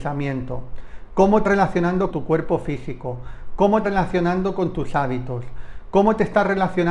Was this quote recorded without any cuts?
no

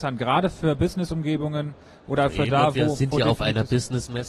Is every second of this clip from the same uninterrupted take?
yes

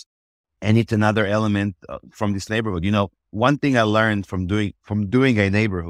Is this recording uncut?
no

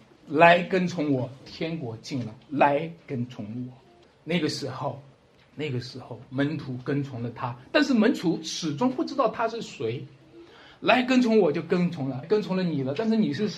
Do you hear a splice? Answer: yes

